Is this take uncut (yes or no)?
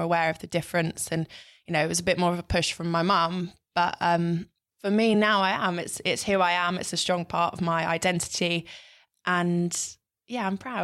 yes